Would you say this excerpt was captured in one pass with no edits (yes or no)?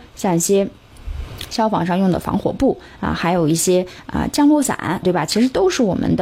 no